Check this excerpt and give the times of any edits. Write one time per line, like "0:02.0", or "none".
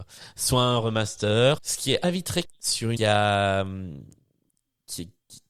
0:01.6
0:02.0
0:02.4
0:03.0